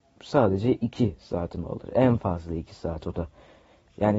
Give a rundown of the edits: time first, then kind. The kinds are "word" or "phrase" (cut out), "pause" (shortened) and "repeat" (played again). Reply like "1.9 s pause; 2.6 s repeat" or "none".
none